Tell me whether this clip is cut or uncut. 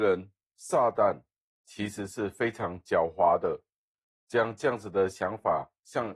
uncut